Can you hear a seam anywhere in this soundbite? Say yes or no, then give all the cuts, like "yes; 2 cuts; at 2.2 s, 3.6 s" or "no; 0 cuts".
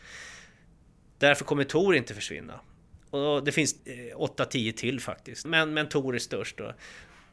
yes; 1 cut; at 5.4 s